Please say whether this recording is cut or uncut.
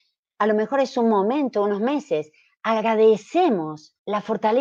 uncut